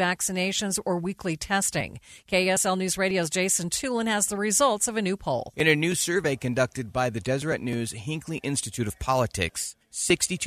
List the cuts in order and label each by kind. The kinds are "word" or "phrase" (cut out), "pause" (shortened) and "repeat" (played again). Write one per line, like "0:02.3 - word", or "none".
none